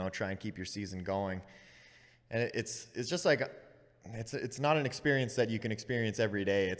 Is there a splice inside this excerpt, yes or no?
no